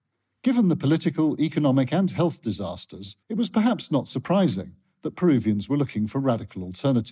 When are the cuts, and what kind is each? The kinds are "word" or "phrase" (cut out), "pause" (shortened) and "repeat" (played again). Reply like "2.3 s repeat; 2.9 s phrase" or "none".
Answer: 3.2 s pause